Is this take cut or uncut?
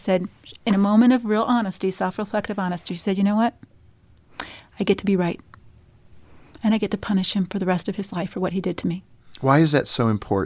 uncut